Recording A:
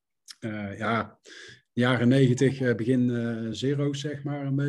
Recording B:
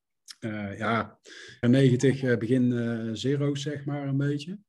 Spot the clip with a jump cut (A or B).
B